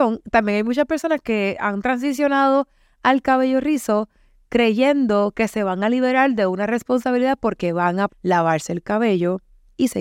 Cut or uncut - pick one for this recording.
cut